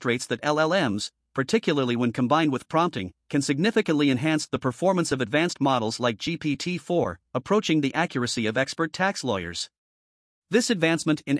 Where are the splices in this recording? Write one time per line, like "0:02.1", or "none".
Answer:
none